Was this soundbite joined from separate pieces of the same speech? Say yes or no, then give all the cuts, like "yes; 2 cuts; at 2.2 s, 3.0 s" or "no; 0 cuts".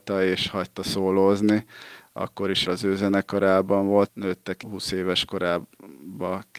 yes; 3 cuts; at 2.7 s, 4.1 s, 4.6 s